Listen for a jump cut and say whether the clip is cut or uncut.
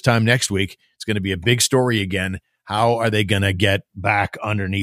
uncut